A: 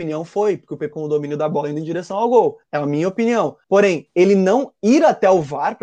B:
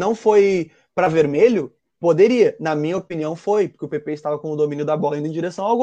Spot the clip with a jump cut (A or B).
A